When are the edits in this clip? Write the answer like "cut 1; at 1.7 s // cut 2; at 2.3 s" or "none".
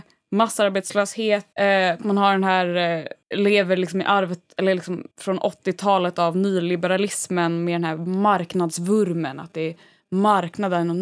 cut 1; at 1.5 s // cut 2; at 3.2 s // cut 3; at 5.1 s